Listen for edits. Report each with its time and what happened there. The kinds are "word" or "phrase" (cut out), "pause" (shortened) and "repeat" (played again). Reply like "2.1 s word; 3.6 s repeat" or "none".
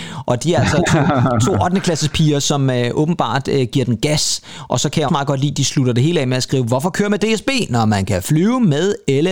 5.1 s word